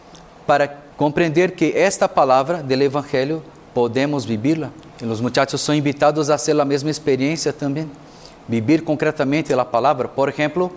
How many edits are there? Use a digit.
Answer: 2